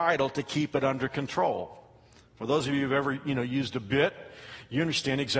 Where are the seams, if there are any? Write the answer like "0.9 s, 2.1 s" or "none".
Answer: none